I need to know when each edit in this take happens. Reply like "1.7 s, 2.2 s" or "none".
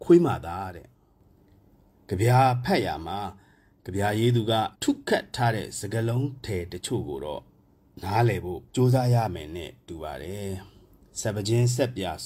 4.7 s, 8.7 s